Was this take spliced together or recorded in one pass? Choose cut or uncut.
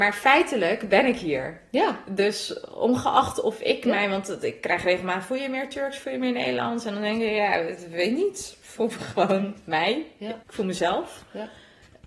cut